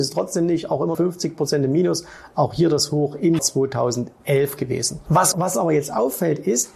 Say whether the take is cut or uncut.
cut